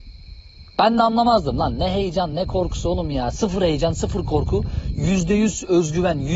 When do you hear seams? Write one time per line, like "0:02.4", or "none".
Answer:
none